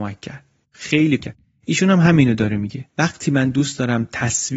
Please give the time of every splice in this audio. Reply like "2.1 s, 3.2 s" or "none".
1.2 s, 2.9 s